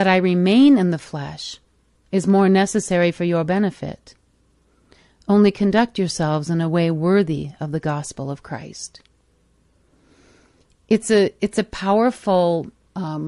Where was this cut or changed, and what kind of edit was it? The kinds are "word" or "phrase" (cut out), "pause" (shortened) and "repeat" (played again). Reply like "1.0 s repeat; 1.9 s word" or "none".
none